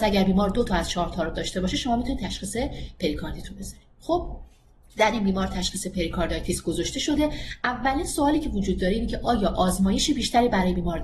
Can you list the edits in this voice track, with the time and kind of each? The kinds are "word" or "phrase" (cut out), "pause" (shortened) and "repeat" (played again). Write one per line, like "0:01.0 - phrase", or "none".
none